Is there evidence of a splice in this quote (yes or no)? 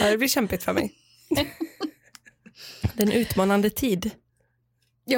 no